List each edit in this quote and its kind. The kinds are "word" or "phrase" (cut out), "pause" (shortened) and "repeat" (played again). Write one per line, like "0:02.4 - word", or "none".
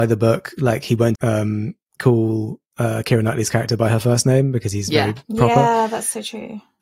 0:01.2 - word